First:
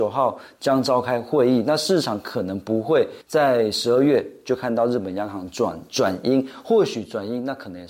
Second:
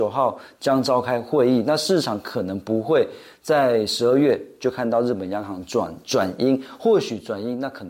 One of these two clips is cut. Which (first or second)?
first